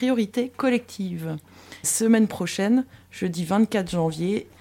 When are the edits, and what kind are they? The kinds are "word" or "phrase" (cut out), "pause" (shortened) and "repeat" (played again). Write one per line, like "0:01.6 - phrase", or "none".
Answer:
0:01.8 - phrase
0:02.9 - pause